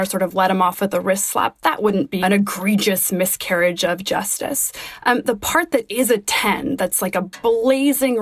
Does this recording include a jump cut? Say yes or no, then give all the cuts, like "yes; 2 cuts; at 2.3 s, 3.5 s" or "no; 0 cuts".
yes; 2 cuts; at 2.2 s, 5.2 s